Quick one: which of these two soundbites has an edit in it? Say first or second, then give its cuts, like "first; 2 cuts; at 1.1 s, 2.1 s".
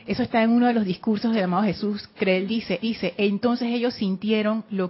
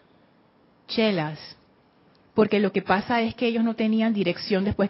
first; 1 cut; at 2.8 s